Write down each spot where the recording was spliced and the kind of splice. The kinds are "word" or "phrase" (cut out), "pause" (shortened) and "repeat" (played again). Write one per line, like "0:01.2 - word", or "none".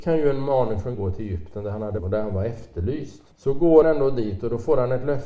0:00.9 - phrase
0:02.0 - phrase
0:03.3 - pause
0:03.8 - word

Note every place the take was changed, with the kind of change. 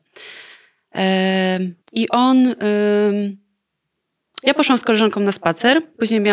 0:01.8 - pause

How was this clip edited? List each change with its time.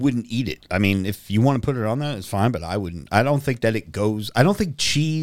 none

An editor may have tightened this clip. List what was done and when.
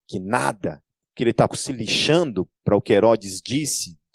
0:01.5 - word

